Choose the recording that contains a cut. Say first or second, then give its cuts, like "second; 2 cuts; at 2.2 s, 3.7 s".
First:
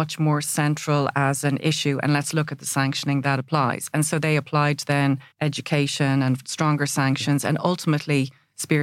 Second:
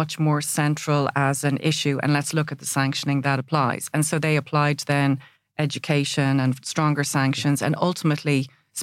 first; 1 cut; at 5.3 s